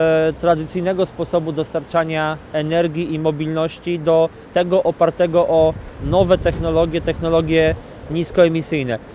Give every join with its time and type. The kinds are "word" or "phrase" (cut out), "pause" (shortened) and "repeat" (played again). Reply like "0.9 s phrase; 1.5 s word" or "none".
4.4 s pause